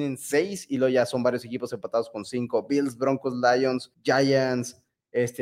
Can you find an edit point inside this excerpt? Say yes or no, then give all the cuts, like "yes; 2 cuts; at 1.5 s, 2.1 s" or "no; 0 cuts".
yes; 1 cut; at 3.9 s